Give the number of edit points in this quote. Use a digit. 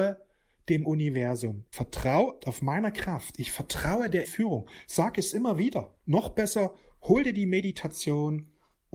4